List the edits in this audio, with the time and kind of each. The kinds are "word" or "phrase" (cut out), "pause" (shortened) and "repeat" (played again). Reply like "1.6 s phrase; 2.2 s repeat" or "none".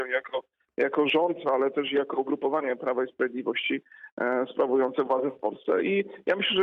none